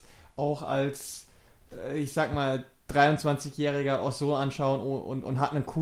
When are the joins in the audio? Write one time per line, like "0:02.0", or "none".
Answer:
none